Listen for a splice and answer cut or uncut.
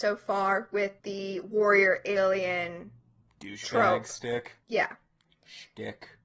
cut